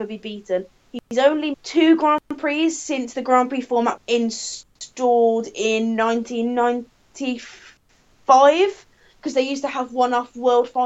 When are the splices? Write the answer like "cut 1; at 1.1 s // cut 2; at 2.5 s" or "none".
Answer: cut 1; at 1.5 s // cut 2; at 4.0 s